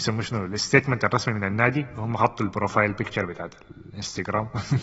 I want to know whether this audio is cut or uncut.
uncut